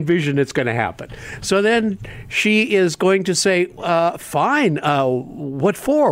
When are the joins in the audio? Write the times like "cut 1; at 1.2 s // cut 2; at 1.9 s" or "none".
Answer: cut 1; at 3.8 s